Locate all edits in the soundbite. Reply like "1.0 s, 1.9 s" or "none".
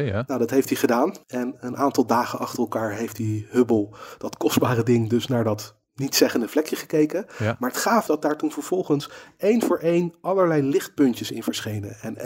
1.2 s, 8.1 s